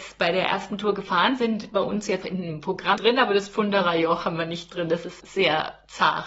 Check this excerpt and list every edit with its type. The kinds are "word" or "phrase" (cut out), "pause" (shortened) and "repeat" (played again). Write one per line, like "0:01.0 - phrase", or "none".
0:01.4 - word
0:02.2 - word
0:03.0 - word
0:05.2 - word